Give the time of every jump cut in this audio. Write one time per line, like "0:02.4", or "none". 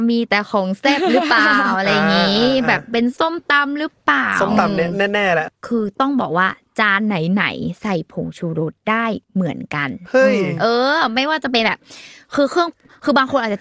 0:09.2

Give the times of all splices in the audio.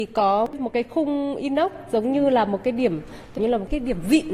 0:03.4

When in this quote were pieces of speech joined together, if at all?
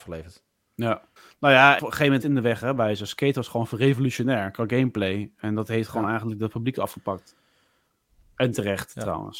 0:01.2
0:01.8
0:02.2

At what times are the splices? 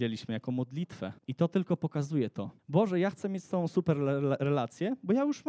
0:01.2
0:02.6

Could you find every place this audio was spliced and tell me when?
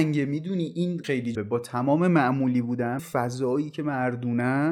0:01.0
0:01.3
0:03.0

